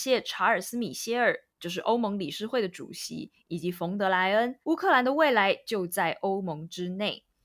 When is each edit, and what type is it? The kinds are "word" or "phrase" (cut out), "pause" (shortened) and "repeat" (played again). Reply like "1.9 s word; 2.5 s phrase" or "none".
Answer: 4.6 s pause